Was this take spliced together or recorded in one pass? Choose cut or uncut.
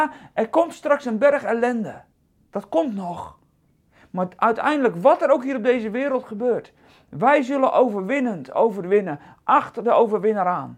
uncut